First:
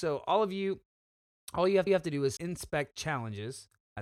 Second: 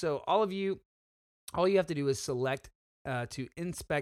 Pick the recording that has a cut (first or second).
first